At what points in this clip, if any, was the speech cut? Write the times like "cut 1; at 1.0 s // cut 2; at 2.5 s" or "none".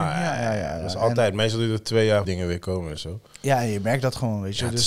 cut 1; at 2.2 s